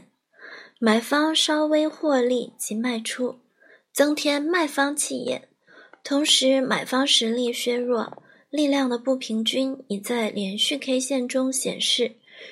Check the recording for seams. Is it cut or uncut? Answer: uncut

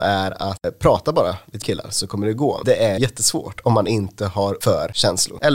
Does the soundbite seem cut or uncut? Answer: cut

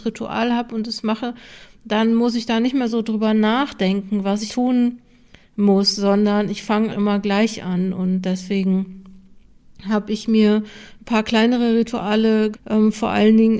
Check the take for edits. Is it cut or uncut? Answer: cut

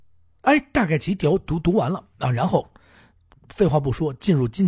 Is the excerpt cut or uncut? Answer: uncut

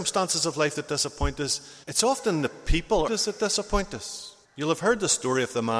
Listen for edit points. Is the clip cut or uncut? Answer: cut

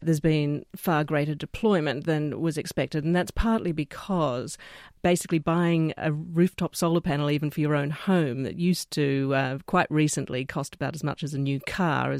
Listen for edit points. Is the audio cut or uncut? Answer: uncut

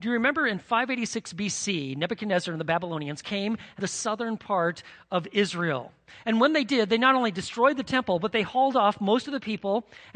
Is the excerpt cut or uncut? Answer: cut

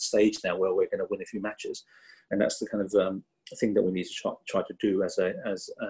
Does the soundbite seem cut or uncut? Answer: uncut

